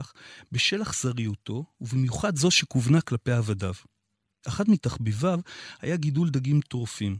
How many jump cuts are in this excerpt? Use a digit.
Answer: 0